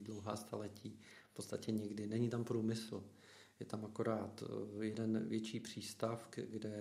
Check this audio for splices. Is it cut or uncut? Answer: uncut